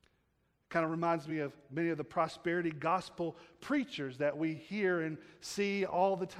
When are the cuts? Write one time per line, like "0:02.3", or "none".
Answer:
none